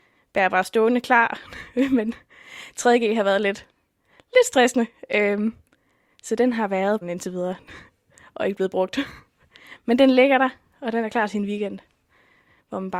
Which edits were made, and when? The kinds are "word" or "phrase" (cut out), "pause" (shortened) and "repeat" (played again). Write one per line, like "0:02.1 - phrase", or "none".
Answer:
0:07.0 - phrase